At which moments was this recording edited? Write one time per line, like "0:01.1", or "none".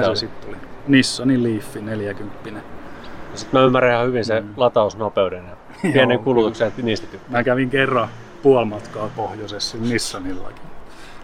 none